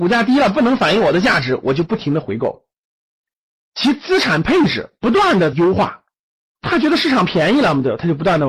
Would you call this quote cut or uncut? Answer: cut